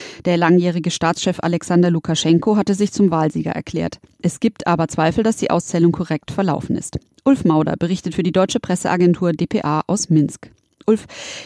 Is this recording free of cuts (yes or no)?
yes